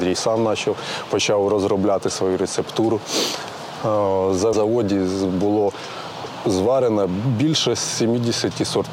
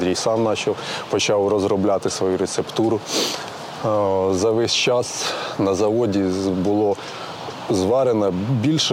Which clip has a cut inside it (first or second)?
first